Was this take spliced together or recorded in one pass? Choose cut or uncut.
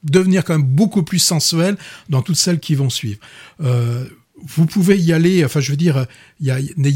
cut